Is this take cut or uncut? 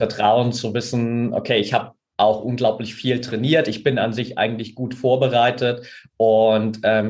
uncut